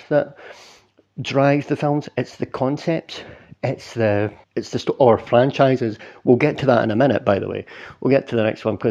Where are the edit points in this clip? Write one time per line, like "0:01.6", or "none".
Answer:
0:04.4